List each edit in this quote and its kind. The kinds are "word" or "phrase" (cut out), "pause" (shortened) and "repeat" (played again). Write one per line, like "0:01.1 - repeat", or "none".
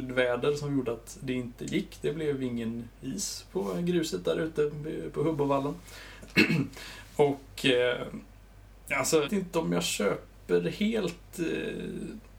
0:09.2 - word